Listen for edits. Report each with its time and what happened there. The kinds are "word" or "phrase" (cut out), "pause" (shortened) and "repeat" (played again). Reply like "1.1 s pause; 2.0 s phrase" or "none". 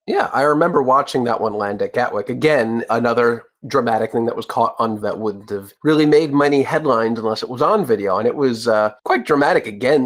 5.0 s word; 5.8 s pause; 9.0 s pause